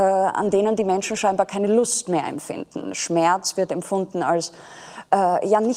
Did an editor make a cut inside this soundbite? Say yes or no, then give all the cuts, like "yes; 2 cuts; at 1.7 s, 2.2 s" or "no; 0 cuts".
no; 0 cuts